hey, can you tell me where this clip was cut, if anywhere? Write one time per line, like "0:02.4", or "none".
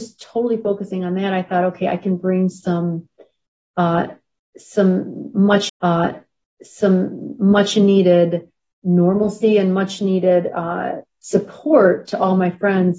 0:05.7